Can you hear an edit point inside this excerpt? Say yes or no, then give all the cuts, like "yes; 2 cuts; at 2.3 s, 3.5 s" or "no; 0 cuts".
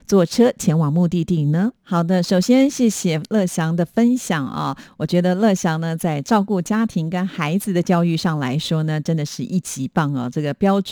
yes; 1 cut; at 1.8 s